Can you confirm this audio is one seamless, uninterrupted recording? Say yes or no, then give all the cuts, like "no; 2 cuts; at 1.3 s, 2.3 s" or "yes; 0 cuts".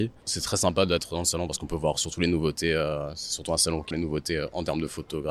no; 1 cut; at 3.9 s